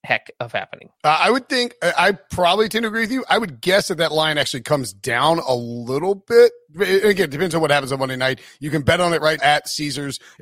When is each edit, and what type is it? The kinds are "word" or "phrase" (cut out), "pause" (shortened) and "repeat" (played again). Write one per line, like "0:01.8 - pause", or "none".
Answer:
0:01.0 - pause
0:09.4 - word